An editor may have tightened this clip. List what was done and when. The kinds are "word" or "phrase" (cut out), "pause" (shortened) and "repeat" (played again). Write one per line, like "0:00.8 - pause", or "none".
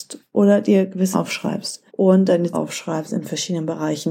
0:01.1 - word
0:01.9 - pause
0:02.5 - word